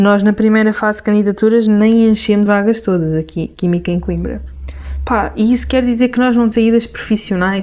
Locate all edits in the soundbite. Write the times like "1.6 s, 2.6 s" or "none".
2.5 s, 6.5 s